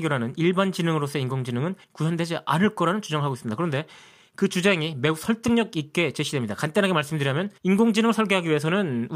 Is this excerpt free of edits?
no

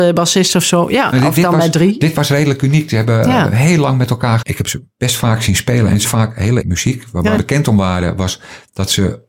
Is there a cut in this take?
yes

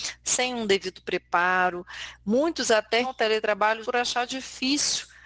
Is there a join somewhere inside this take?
yes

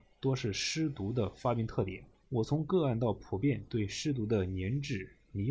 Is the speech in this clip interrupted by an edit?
yes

